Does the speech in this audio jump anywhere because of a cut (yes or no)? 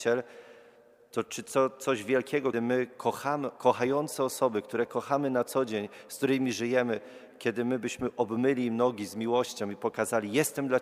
yes